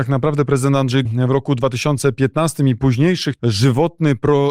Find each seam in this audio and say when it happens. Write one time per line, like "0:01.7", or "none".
0:01.0
0:03.4